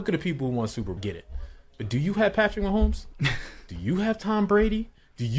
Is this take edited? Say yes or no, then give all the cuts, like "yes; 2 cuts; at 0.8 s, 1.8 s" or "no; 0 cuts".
yes; 1 cut; at 1.0 s